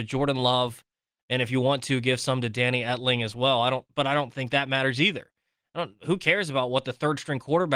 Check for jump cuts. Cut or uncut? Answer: uncut